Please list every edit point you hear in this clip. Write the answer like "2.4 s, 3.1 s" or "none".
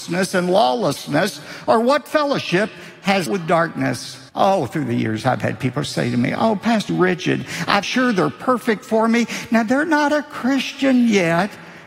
3.3 s, 4.3 s, 6.9 s, 7.8 s